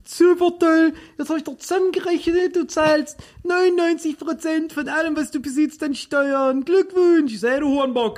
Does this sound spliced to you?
no; 0 cuts

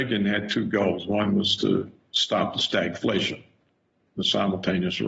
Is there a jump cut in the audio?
no; 0 cuts

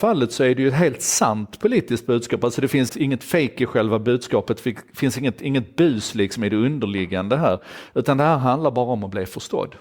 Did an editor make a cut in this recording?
yes; 1 cut; at 2.9 s

